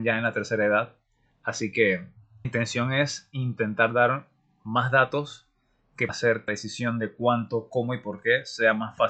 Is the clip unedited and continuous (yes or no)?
no